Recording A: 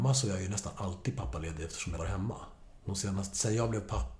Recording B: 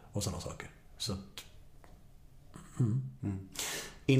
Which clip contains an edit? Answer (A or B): A